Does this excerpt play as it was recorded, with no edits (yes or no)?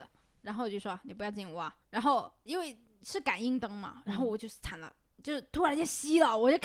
no